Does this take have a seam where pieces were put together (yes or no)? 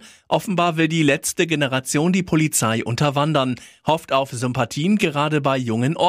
no